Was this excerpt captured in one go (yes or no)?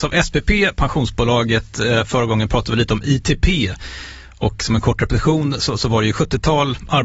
yes